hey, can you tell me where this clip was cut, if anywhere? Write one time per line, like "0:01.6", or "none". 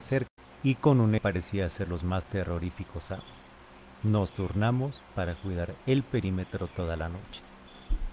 0:01.2